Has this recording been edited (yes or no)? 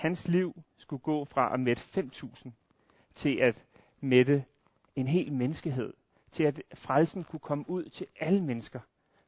no